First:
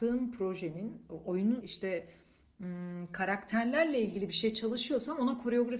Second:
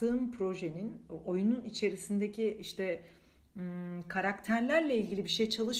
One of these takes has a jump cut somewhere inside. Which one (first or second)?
first